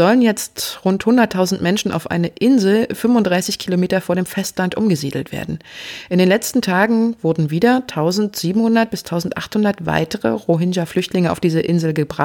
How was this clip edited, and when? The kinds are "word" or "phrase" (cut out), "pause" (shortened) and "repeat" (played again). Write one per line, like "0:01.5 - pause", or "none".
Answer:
none